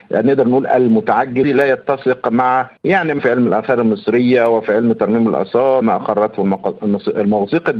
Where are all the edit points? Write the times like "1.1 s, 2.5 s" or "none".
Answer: 1.4 s, 2.8 s, 3.2 s, 5.8 s